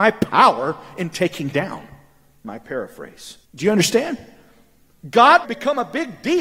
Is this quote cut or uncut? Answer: cut